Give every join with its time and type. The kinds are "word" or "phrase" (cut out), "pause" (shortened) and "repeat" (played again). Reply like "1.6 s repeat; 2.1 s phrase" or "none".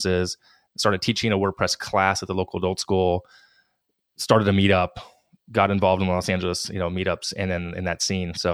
none